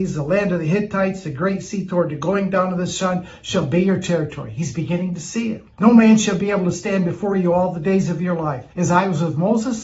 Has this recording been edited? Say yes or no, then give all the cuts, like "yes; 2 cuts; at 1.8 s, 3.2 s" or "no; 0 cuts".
yes; 2 cuts; at 5.7 s, 8.7 s